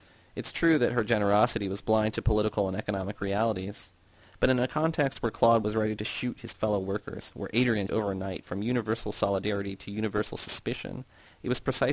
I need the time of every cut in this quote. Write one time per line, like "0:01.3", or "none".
0:07.9